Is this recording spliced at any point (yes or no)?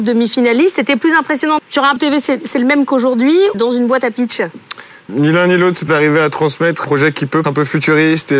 yes